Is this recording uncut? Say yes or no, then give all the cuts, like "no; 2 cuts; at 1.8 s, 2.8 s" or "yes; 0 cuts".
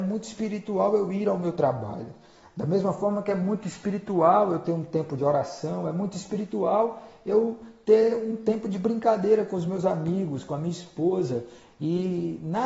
yes; 0 cuts